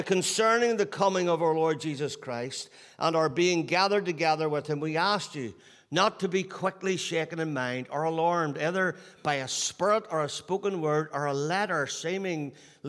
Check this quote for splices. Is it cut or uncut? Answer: uncut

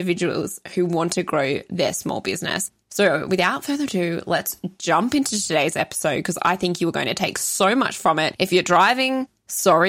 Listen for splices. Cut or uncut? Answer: uncut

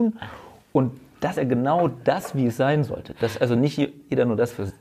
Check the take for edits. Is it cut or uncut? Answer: cut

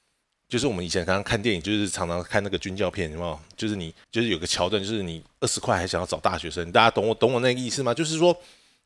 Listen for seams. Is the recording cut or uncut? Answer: cut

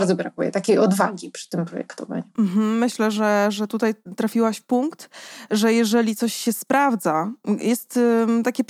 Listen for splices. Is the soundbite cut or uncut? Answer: uncut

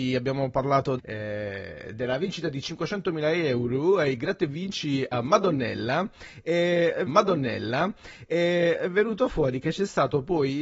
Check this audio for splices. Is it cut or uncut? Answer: cut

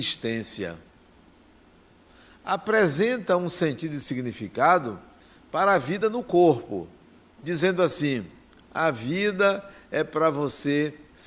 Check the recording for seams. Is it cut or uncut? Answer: uncut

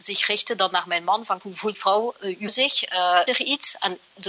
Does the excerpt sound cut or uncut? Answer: cut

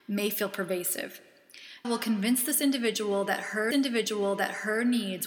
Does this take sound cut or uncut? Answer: cut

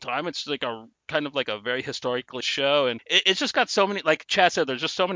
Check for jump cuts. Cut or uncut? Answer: uncut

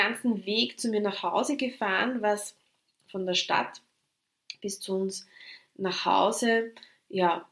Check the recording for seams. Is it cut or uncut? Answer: uncut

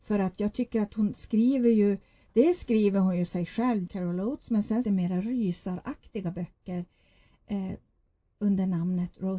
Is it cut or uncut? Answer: cut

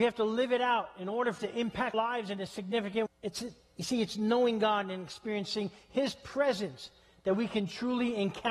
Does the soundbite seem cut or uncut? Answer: cut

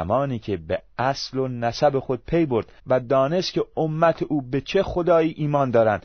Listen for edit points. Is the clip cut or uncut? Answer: cut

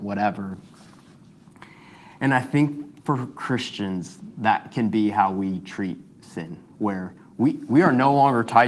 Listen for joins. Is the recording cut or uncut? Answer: cut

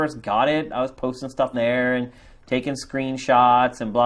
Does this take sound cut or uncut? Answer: cut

